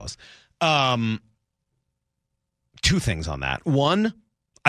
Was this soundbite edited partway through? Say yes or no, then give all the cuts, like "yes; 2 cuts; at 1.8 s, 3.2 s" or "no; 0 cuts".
no; 0 cuts